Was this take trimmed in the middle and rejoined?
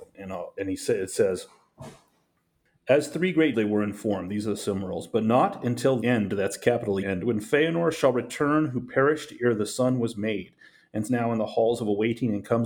yes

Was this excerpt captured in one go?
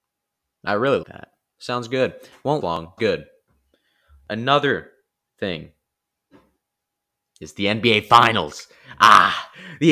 no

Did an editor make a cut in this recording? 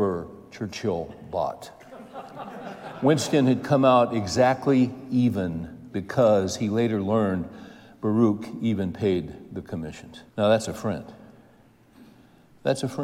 yes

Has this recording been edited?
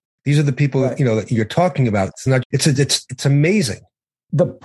yes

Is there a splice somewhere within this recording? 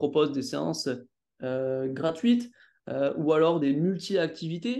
no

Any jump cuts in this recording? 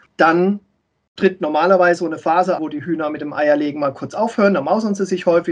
yes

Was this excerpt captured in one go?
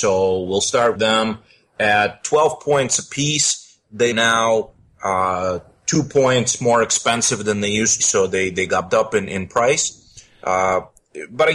no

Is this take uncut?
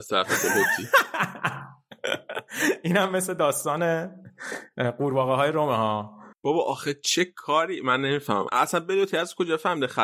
no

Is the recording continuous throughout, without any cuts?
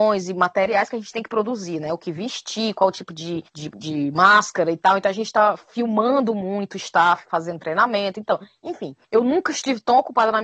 no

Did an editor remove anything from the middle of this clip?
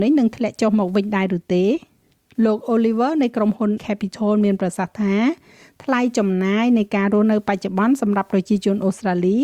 yes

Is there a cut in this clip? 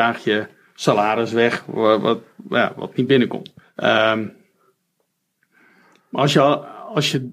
yes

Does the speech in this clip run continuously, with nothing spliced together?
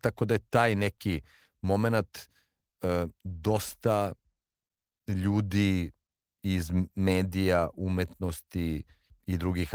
yes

